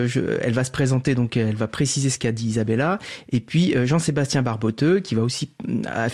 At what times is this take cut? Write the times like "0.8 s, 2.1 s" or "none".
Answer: none